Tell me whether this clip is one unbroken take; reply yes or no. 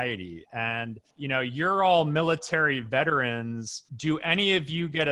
no